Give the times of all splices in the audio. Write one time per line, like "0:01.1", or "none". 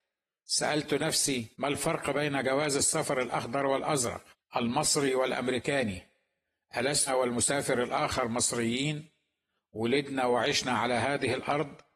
0:01.5
0:04.3
0:07.1